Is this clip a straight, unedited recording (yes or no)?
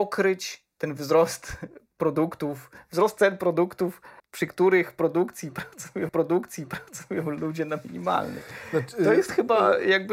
no